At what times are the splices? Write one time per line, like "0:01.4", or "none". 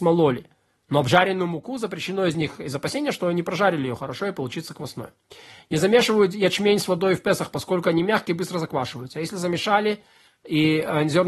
none